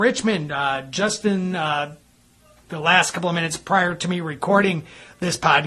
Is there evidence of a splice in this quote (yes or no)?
no